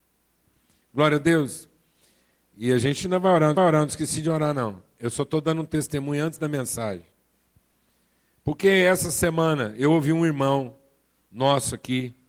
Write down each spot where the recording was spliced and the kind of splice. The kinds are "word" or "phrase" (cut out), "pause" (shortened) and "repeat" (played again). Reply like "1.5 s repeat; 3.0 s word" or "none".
3.6 s repeat